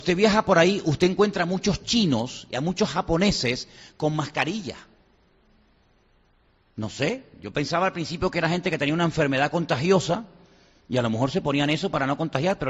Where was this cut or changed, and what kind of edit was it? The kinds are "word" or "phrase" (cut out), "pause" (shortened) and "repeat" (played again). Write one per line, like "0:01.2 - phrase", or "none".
none